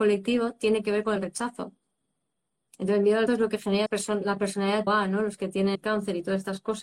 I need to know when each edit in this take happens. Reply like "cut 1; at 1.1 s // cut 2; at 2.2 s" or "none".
cut 1; at 1.2 s // cut 2; at 3.3 s // cut 3; at 3.9 s // cut 4; at 4.9 s // cut 5; at 5.7 s